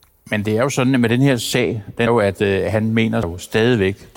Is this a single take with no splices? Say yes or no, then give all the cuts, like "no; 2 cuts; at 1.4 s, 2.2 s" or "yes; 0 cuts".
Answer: no; 2 cuts; at 2.1 s, 3.2 s